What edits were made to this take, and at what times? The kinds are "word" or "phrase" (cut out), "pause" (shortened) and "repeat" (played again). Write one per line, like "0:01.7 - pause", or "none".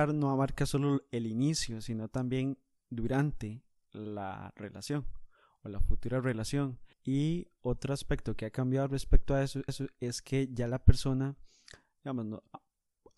0:06.9 - pause
0:09.7 - repeat